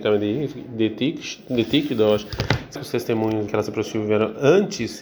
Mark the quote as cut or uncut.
cut